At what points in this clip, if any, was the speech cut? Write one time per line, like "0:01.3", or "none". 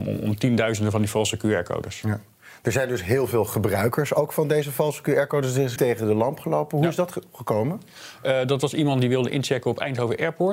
0:05.8

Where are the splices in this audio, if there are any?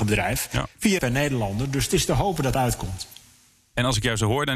0:01.0
0:02.5

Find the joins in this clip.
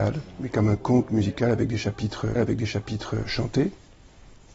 0:02.4

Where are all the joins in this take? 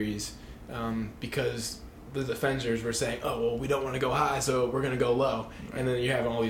none

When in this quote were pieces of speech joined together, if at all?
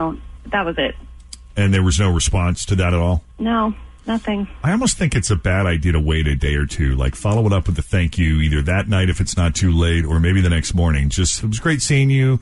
none

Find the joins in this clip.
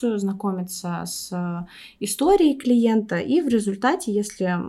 none

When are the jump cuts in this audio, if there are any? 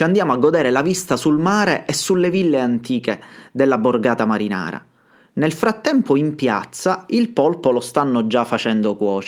none

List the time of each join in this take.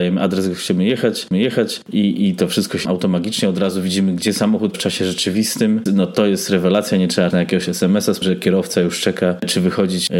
0:01.3
0:02.8
0:04.7
0:05.9
0:07.3
0:08.2

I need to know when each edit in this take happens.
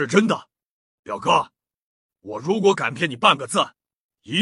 none

